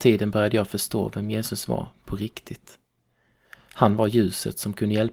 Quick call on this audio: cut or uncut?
uncut